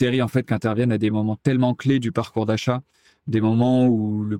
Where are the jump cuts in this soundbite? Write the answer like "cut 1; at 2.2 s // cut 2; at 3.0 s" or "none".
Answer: none